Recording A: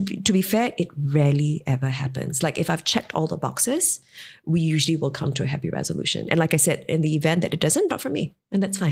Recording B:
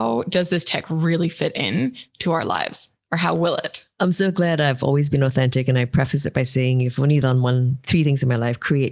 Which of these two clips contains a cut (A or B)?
A